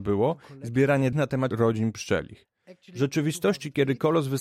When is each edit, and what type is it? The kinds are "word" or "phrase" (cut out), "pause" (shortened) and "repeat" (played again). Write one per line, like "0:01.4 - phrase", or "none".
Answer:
0:01.1 - word
0:01.5 - word